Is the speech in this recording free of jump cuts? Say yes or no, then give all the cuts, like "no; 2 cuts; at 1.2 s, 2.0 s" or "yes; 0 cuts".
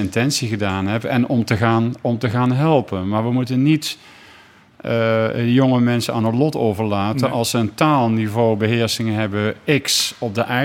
yes; 0 cuts